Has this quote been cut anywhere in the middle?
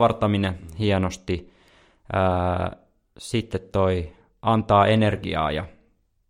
no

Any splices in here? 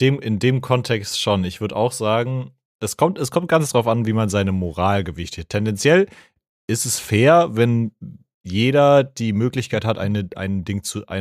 no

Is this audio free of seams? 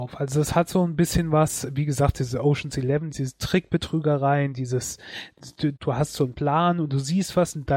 no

